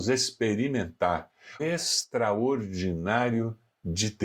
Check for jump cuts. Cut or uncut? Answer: cut